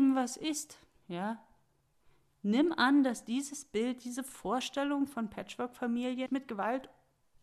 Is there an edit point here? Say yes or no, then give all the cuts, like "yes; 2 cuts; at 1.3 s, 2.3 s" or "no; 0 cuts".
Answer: yes; 1 cut; at 6.3 s